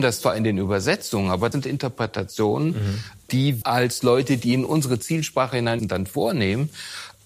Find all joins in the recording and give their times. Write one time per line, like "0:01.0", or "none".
0:01.5
0:03.6
0:05.8